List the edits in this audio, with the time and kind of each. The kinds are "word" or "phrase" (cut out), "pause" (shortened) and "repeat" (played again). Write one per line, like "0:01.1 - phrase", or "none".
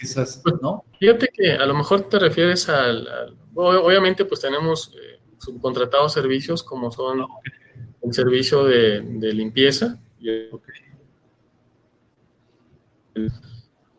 0:00.9 - pause